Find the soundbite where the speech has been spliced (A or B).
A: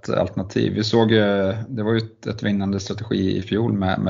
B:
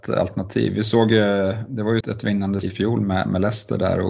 B